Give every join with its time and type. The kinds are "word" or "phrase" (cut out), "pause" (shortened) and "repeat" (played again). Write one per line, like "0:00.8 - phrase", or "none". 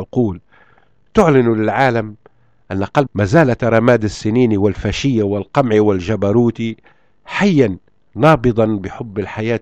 0:03.1 - word
0:03.6 - word